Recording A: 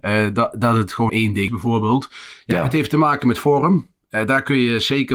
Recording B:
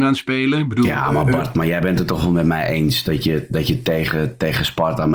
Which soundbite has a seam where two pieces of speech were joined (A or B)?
A